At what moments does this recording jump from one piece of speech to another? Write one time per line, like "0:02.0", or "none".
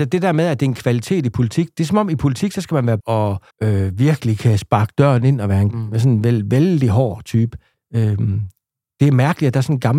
0:03.0
0:03.5
0:07.7

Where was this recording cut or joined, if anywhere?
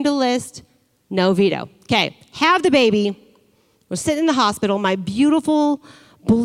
none

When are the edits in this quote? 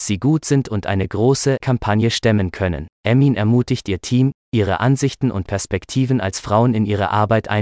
0:01.6
0:02.9

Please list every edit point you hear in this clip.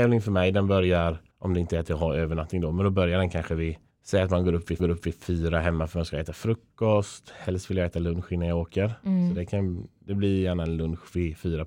0:01.3
0:03.9
0:04.8

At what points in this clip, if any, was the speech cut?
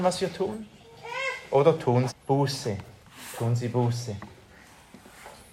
0:02.1

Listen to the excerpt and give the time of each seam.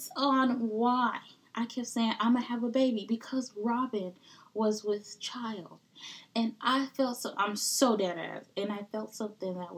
none

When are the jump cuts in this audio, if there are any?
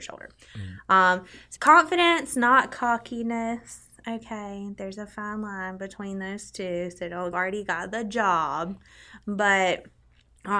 0:01.6
0:07.3

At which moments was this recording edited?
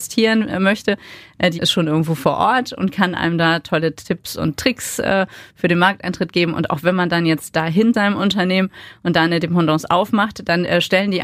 0:01.6
0:07.9

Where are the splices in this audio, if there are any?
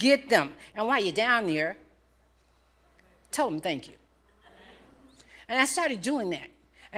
none

